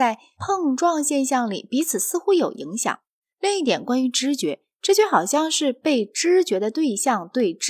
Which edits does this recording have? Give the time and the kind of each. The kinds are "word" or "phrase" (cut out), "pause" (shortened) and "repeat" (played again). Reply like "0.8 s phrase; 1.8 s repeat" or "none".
none